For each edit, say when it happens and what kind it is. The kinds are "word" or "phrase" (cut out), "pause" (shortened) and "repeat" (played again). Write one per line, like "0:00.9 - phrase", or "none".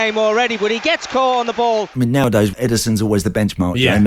none